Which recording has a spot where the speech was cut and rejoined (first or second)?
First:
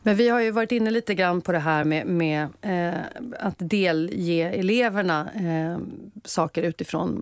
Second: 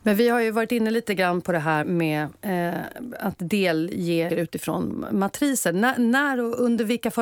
second